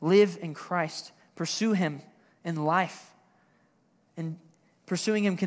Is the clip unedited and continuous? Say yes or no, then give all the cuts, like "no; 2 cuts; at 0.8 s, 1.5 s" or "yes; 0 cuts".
yes; 0 cuts